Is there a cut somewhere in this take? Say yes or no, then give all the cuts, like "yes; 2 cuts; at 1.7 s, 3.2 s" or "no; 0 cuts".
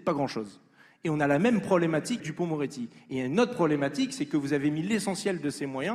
yes; 1 cut; at 2.2 s